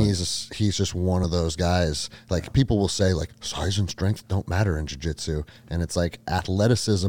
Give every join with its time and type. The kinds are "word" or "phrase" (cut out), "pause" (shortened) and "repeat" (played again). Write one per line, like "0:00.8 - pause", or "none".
none